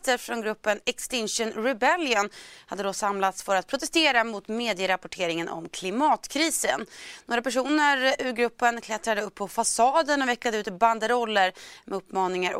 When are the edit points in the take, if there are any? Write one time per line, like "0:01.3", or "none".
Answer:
none